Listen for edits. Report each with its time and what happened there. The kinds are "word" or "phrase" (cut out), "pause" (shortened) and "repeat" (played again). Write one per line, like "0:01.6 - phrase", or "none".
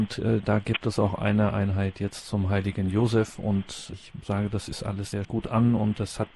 0:05.2 - phrase